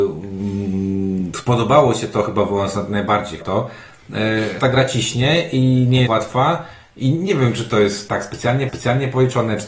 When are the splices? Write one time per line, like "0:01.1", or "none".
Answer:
0:03.4
0:04.6
0:06.1
0:08.1
0:08.7